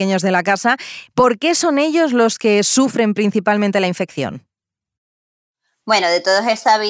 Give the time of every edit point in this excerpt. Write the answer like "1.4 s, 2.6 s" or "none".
none